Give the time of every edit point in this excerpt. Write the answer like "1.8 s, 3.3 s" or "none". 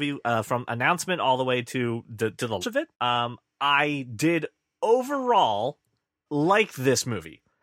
2.6 s, 2.9 s, 6.3 s